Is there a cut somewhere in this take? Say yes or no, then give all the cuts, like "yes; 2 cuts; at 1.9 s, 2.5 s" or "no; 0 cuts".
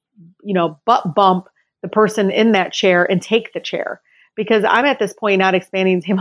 no; 0 cuts